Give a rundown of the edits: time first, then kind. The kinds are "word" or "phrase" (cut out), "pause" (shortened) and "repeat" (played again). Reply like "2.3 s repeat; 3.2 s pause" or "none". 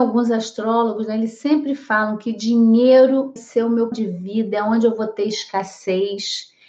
3.4 s word; 3.9 s word